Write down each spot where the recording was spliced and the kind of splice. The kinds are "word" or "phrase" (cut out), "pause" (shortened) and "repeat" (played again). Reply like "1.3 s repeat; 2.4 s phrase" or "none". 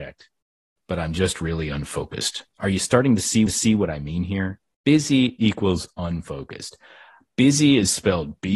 2.5 s pause; 3.5 s repeat; 4.7 s pause